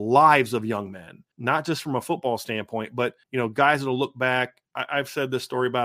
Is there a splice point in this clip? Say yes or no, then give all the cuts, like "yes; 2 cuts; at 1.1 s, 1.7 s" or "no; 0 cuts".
yes; 2 cuts; at 1.3 s, 3.2 s